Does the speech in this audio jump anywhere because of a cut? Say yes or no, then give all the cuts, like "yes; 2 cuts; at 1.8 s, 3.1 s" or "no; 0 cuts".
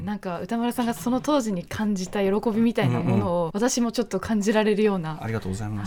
yes; 1 cut; at 3.5 s